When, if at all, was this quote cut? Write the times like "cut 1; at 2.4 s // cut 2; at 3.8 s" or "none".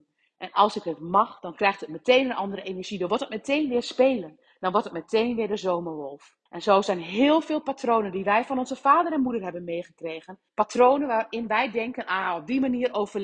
cut 1; at 6.5 s // cut 2; at 10.5 s

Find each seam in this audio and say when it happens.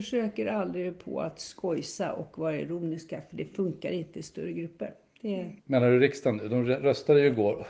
cut 1; at 5.6 s

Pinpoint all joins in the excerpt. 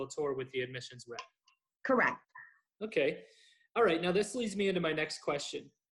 none

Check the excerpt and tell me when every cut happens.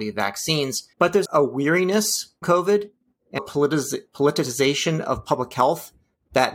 cut 1; at 0.9 s // cut 2; at 1.2 s // cut 3; at 2.4 s // cut 4; at 3.4 s

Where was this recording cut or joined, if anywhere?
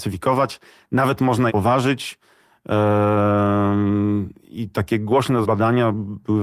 cut 1; at 1.5 s // cut 2; at 5.4 s

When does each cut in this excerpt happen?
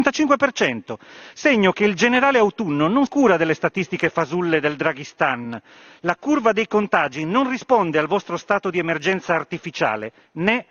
cut 1; at 3.1 s

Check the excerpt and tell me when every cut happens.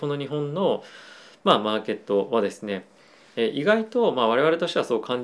none

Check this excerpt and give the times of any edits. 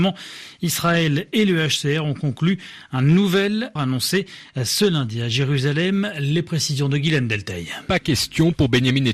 cut 1; at 3.8 s

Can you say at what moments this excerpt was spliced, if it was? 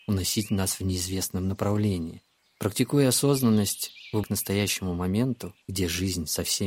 cut 1; at 2.4 s // cut 2; at 4.2 s // cut 3; at 5.6 s

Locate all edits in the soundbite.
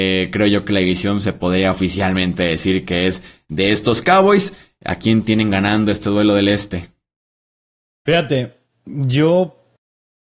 none

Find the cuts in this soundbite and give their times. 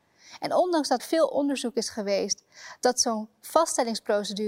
cut 1; at 1.0 s

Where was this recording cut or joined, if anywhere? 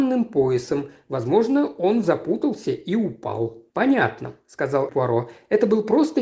cut 1; at 2.0 s // cut 2; at 3.7 s // cut 3; at 4.9 s

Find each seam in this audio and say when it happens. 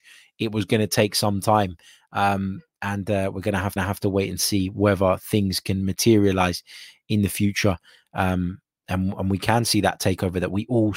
cut 1; at 3.8 s

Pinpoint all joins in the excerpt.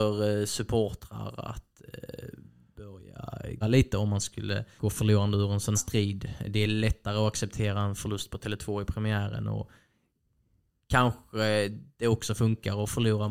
cut 1; at 3.6 s // cut 2; at 4.8 s // cut 3; at 5.7 s

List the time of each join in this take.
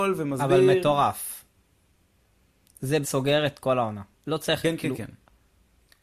cut 1; at 3.0 s

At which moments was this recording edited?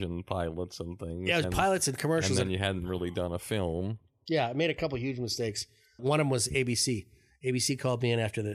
cut 1; at 1.4 s // cut 2; at 6.0 s

